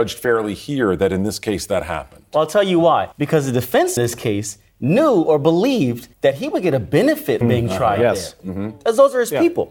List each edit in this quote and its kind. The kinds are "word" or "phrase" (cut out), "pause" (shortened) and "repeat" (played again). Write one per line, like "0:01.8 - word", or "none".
0:03.1 - pause
0:04.0 - word
0:06.1 - pause
0:07.4 - word